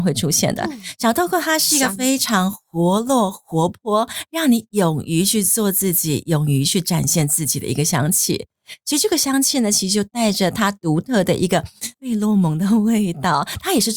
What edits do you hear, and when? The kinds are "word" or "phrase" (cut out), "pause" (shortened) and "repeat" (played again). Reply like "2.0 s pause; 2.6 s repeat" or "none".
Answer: 11.9 s pause